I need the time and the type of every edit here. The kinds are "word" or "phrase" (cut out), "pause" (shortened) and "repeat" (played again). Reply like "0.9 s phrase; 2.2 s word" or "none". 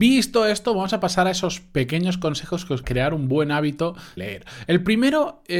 2.8 s phrase; 4.2 s word